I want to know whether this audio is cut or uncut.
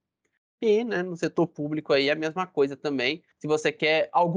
cut